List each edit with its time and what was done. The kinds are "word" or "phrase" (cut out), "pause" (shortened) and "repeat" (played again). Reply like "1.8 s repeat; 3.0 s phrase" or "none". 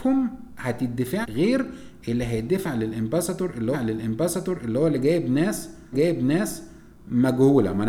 1.2 s word; 3.7 s repeat; 5.9 s repeat